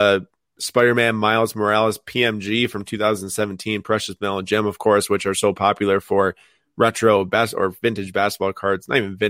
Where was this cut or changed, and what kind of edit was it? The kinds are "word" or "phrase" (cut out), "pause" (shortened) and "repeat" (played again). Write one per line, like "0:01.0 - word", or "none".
none

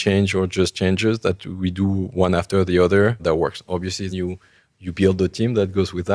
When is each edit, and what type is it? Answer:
0:03.2 - word
0:04.1 - word

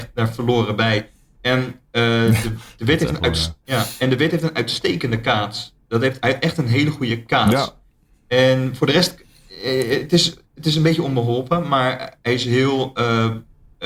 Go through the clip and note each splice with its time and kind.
none

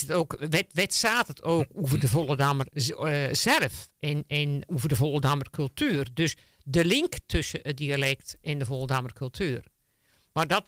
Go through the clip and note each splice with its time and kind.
none

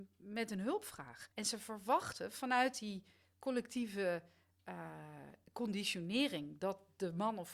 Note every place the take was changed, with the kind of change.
0:01.3 - pause

